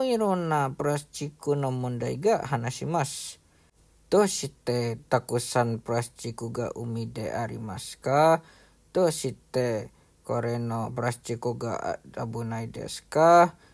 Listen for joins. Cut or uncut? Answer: uncut